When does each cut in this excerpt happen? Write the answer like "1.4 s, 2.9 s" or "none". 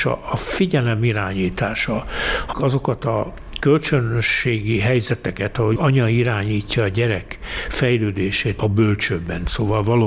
2.5 s, 5.8 s, 8.6 s